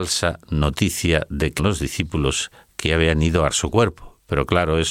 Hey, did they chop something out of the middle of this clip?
yes; 2 cuts; at 1.6 s, 3.5 s

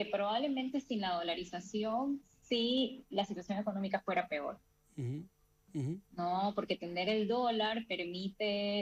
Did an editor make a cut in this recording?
no; 0 cuts

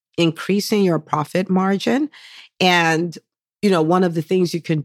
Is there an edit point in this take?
no; 0 cuts

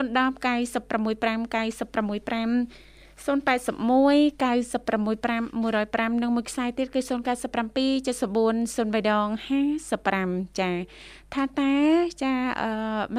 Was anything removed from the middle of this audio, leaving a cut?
no; 0 cuts

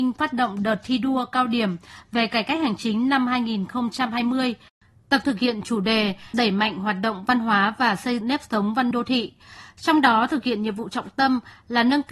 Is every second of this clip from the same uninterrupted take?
no; 4 cuts; at 5.2 s, 6.3 s, 8.2 s, 8.9 s

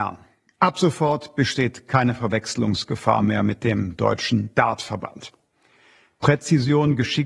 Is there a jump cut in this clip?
no; 0 cuts

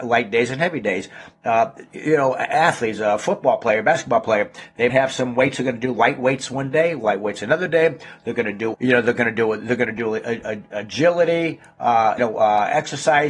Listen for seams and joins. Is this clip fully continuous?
no; 3 cuts; at 4.9 s, 8.7 s, 12.2 s

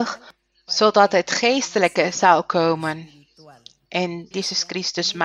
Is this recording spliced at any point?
yes; 1 cut; at 4.3 s

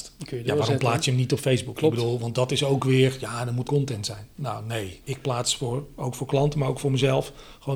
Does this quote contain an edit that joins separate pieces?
yes; 2 cuts; at 3.6 s, 5.0 s

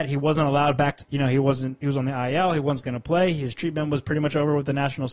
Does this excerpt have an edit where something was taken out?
yes; 1 cut; at 1.0 s

